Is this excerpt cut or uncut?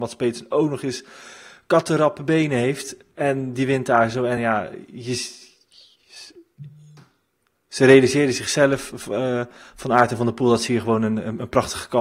uncut